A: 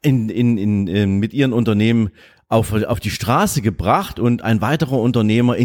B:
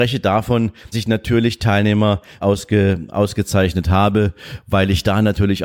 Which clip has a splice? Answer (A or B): B